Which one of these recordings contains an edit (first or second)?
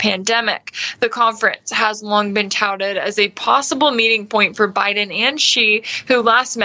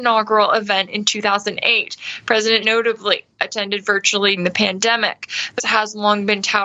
second